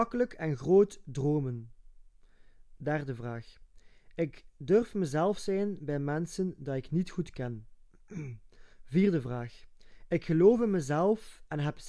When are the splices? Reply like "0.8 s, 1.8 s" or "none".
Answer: 8.7 s